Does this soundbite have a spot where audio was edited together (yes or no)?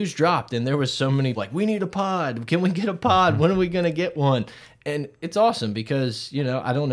yes